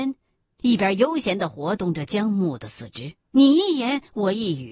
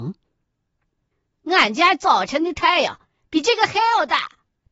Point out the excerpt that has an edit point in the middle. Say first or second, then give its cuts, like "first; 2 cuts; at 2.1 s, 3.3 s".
first; 1 cut; at 3.2 s